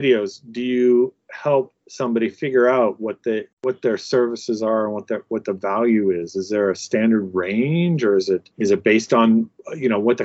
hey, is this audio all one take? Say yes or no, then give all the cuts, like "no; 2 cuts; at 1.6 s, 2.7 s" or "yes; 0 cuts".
no; 2 cuts; at 3.5 s, 8.5 s